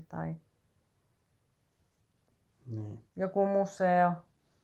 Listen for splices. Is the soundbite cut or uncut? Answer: cut